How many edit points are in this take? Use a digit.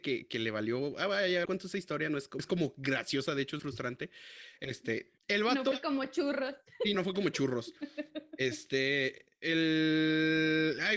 6